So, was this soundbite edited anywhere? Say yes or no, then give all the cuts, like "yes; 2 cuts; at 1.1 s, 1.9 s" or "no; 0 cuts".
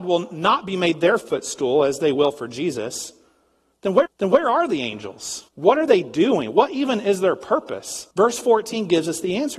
yes; 3 cuts; at 4.1 s, 5.5 s, 8.1 s